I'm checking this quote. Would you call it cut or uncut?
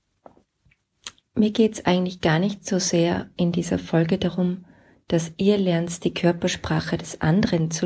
uncut